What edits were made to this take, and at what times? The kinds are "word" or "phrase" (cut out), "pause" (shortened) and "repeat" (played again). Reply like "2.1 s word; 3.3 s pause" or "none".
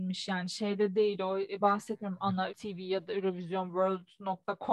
1.6 s word; 2.5 s word